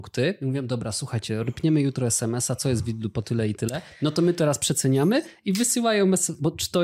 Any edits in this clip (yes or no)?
no